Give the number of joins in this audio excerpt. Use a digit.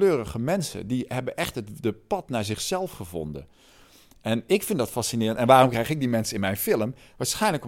0